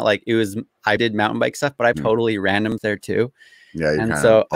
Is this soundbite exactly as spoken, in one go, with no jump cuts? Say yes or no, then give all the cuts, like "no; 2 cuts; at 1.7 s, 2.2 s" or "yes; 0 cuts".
no; 3 cuts; at 1.0 s, 1.9 s, 2.8 s